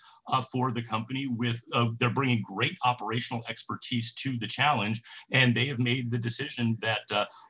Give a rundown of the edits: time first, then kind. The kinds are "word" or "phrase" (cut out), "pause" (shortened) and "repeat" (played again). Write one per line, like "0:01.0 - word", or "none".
none